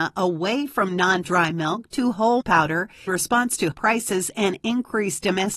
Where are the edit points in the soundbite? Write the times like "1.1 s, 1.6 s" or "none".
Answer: 1.2 s, 2.4 s, 3.1 s, 3.7 s